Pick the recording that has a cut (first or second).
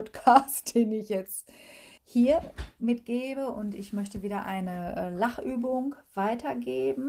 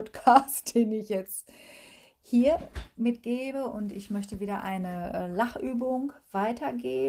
first